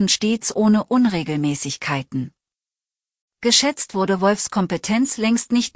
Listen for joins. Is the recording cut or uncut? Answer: uncut